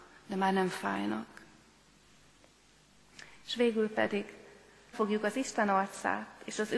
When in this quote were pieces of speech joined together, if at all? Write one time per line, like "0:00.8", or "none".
0:04.9